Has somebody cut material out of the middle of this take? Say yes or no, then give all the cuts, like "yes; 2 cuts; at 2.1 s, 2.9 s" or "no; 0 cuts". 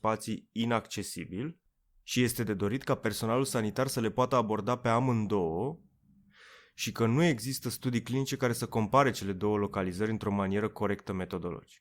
no; 0 cuts